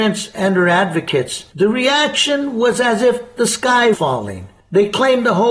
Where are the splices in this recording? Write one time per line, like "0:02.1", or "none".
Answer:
0:01.5
0:03.9